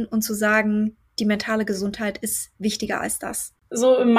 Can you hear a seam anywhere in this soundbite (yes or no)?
no